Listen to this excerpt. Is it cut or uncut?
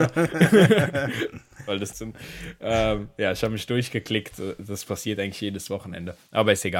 cut